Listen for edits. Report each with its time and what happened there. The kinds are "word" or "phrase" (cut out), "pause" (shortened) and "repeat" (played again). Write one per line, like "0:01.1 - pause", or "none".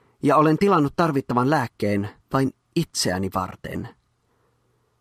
0:02.2 - pause